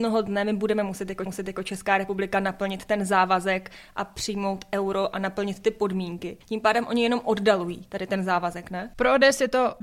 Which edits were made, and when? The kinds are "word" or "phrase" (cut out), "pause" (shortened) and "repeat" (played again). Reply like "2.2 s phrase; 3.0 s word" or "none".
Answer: 1.3 s repeat; 6.4 s pause